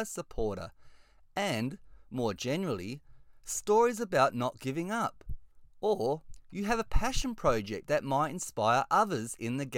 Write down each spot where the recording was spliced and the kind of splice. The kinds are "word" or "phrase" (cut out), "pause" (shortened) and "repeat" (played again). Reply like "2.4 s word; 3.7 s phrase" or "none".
none